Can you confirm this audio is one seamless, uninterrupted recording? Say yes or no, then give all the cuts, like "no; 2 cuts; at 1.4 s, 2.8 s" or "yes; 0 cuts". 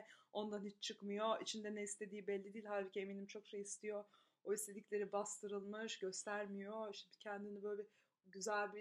yes; 0 cuts